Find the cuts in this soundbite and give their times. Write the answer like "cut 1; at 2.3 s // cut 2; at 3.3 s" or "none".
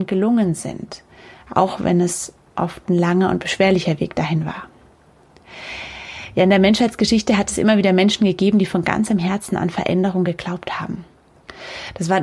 none